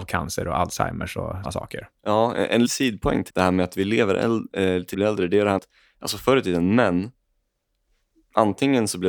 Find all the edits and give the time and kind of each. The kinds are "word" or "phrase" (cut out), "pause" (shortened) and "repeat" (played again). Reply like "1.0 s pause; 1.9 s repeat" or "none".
1.4 s word; 2.6 s word; 3.3 s word; 4.9 s word; 5.6 s word